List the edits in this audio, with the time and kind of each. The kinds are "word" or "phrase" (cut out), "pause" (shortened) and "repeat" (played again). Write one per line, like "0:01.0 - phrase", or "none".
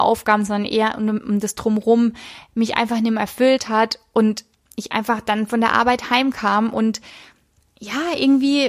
none